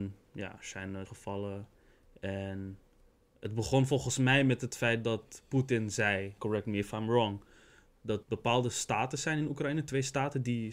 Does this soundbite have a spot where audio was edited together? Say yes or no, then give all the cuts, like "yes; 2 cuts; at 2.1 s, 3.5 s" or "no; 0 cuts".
yes; 3 cuts; at 1.1 s, 6.4 s, 8.2 s